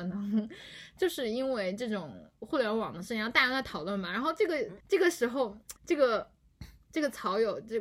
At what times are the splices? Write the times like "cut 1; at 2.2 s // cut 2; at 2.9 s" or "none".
cut 1; at 4.8 s // cut 2; at 5.8 s